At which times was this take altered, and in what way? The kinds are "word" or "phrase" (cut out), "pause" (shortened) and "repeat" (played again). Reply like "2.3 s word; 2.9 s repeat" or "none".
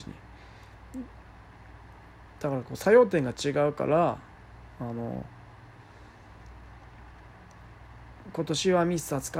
none